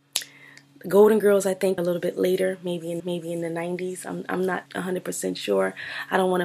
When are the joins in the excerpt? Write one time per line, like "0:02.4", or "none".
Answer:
0:01.8
0:03.0
0:04.7